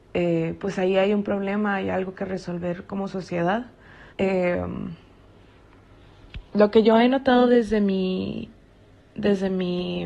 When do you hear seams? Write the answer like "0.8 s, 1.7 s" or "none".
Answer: 4.1 s